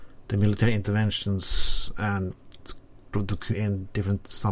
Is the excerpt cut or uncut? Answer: cut